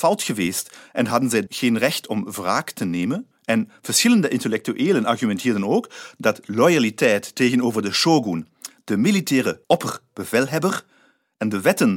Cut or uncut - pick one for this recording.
cut